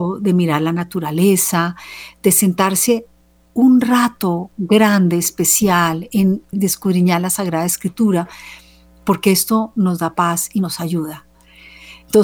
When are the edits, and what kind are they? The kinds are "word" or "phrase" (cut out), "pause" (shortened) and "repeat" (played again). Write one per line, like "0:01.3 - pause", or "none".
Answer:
0:06.5 - word

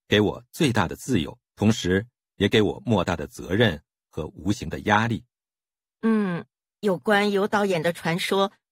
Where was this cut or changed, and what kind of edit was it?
0:01.4 - pause

